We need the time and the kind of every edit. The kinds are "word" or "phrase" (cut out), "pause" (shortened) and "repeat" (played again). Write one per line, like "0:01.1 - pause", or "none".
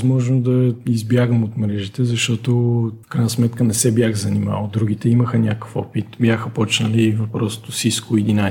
0:03.0 - pause

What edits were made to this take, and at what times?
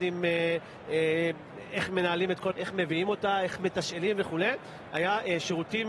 0:02.5 - word

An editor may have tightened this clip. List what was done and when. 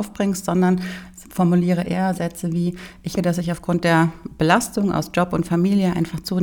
0:02.1 - word
0:03.2 - word

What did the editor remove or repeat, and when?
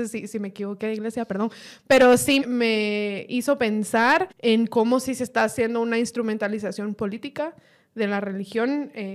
0:02.4 - word
0:04.3 - pause

